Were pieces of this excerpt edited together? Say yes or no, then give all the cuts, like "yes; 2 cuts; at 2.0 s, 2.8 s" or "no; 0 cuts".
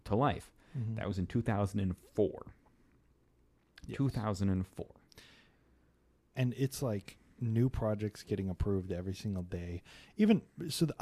no; 0 cuts